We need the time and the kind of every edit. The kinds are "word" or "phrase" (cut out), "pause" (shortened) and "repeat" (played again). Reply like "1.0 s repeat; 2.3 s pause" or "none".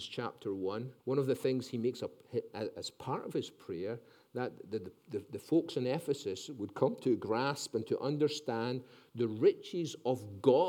1.0 s pause